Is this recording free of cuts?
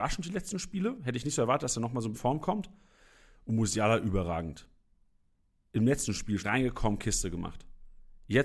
no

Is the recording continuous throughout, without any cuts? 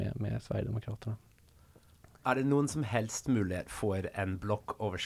yes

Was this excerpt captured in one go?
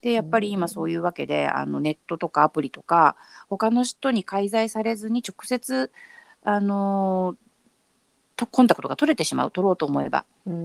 yes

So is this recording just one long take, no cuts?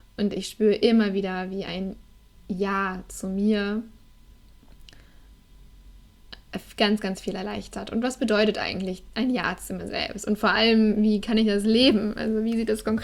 yes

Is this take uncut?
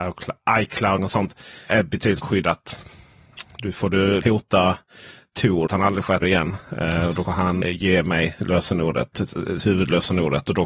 no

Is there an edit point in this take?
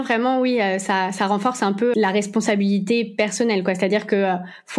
yes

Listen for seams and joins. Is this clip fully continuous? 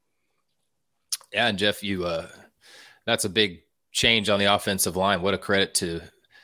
yes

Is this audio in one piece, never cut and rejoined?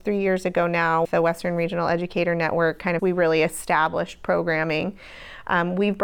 no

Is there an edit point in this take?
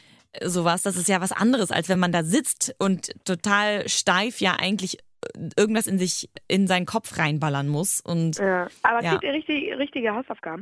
no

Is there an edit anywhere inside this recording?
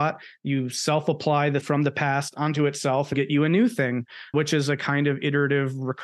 yes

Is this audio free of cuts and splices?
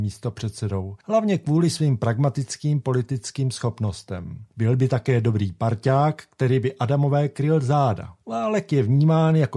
no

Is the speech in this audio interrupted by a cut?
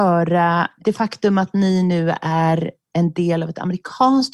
no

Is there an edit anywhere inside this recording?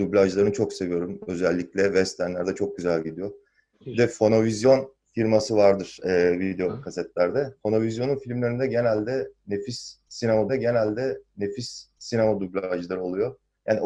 yes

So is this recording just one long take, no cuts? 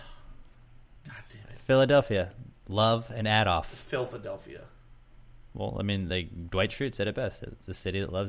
yes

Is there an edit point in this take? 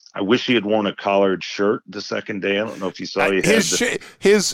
no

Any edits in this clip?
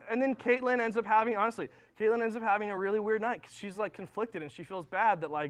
no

